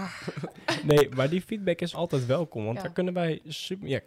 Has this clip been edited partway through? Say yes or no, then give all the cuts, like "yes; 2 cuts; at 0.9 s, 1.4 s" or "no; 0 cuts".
yes; 1 cut; at 1.9 s